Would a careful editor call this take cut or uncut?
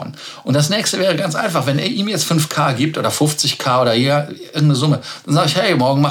uncut